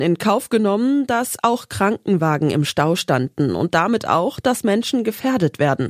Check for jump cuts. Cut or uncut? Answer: uncut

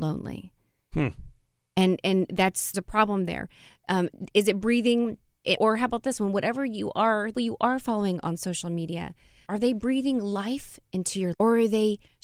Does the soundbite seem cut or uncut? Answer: cut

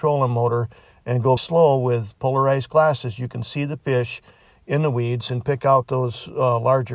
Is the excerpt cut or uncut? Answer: cut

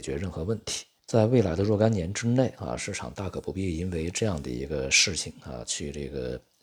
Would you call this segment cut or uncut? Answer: cut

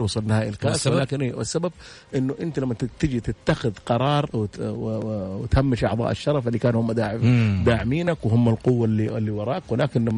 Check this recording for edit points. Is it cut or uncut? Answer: cut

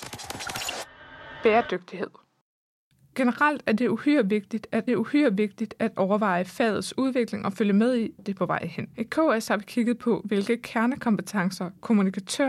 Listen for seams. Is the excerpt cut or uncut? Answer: cut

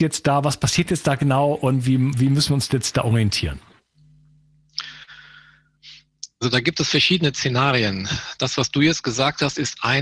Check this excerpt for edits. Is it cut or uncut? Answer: uncut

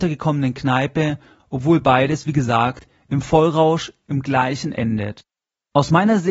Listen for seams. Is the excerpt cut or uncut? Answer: cut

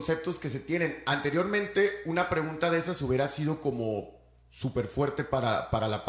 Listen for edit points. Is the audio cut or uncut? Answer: uncut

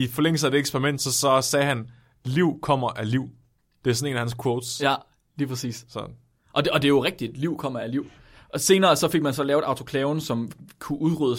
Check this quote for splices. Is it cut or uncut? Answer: uncut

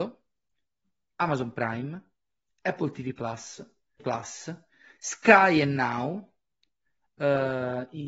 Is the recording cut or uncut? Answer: cut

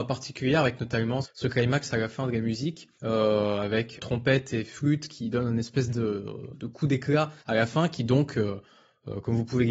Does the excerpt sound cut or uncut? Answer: cut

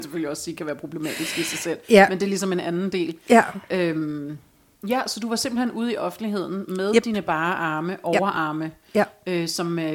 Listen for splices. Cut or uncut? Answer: uncut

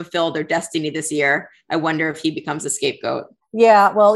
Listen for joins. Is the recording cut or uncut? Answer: uncut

